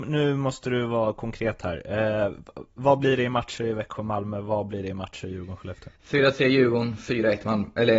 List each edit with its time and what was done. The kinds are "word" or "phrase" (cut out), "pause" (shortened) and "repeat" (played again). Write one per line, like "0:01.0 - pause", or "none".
0:06.0 - pause